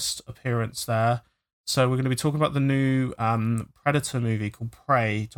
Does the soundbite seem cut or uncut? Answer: uncut